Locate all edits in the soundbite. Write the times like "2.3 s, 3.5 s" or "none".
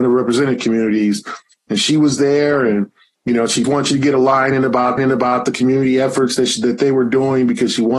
3.6 s, 5.0 s

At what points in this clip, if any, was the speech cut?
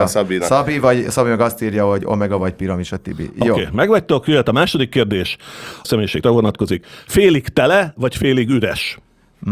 5.8 s, 6.2 s

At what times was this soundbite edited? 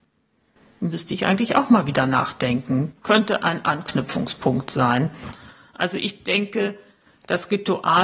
none

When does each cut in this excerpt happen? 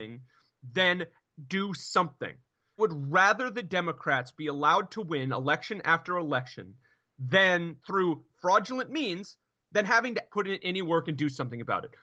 2.8 s, 7.8 s, 10.3 s

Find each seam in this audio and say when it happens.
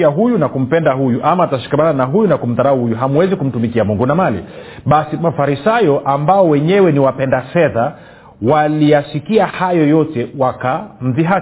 none

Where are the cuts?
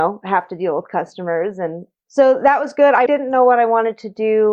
3.1 s

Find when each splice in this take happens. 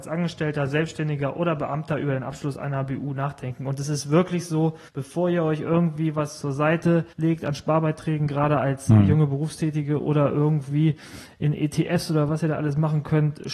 4.9 s, 7.1 s

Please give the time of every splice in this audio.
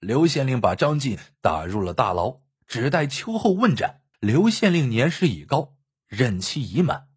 4.1 s

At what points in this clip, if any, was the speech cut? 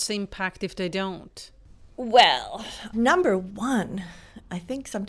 2.9 s

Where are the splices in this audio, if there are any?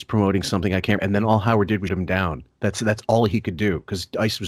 1.0 s, 1.9 s

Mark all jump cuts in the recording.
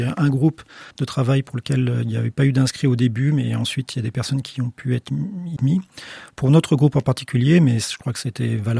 0.9 s, 5.6 s

